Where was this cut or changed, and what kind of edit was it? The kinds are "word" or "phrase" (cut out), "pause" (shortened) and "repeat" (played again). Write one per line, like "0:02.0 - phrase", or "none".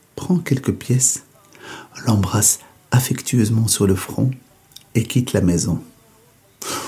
none